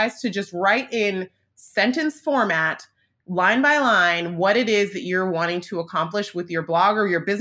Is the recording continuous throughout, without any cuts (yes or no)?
yes